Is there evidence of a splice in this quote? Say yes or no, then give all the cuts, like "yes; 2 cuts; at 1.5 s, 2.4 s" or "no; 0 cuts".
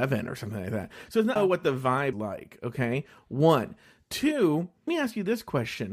yes; 3 cuts; at 1.4 s, 2.1 s, 4.9 s